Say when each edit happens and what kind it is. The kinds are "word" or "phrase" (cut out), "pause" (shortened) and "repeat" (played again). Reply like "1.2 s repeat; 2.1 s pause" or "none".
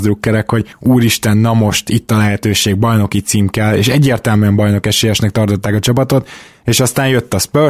none

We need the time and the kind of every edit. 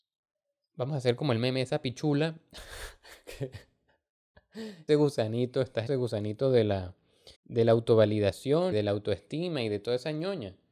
4.9 s word; 5.9 s word; 7.3 s pause; 8.7 s word

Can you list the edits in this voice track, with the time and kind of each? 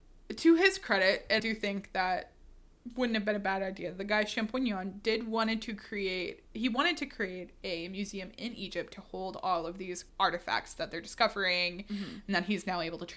1.4 s word; 10.1 s pause

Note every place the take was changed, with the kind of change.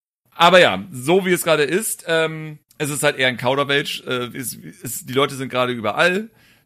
2.7 s pause

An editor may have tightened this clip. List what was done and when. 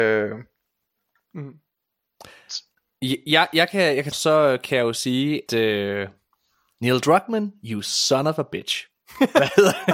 4.1 s phrase; 5.5 s word

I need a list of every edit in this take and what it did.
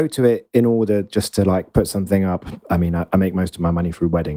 none

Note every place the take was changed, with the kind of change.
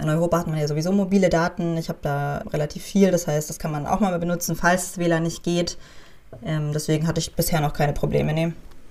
2.4 s word

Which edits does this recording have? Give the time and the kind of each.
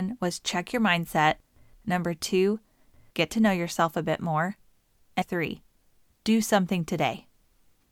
5.2 s word

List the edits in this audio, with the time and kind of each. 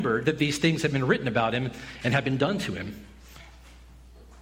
none

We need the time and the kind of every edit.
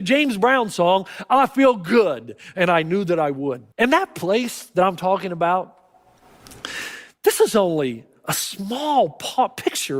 3.7 s pause

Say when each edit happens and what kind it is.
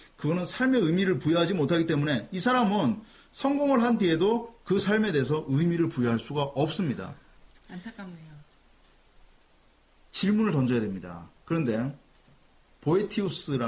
7.4 s pause

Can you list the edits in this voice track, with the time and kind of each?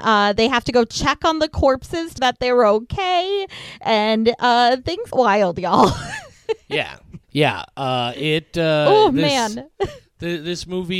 2.2 s phrase; 5.1 s word; 7.2 s pause

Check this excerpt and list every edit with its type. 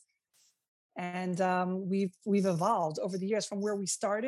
none

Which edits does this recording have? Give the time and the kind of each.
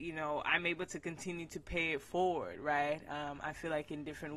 none

